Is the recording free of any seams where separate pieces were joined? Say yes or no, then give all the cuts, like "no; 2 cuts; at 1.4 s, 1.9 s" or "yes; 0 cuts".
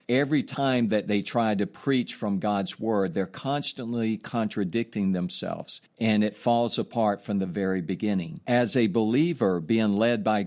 yes; 0 cuts